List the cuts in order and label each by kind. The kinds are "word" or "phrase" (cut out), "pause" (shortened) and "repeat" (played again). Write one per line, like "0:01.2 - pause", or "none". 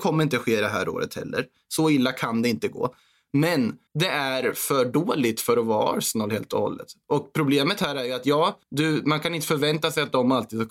0:03.9 - pause
0:08.6 - pause